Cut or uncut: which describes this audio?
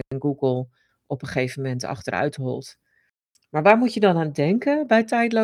uncut